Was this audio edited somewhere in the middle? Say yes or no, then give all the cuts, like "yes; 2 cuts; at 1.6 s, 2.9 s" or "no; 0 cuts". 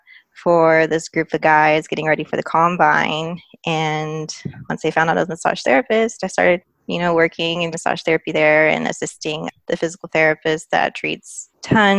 yes; 1 cut; at 7.7 s